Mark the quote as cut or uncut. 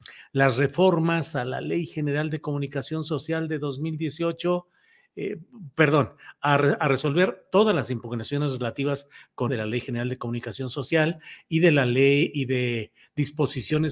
cut